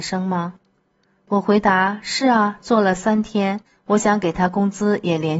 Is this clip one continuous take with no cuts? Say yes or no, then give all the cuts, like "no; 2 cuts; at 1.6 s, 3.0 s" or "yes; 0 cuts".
no; 1 cut; at 3.7 s